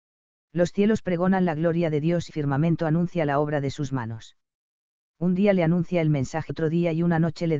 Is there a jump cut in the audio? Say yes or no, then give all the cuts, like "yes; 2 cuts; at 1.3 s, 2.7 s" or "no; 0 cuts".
yes; 2 cuts; at 2.3 s, 6.5 s